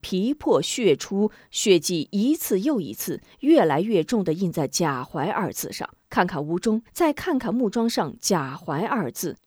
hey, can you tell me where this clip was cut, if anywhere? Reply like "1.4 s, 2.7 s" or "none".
6.0 s, 6.9 s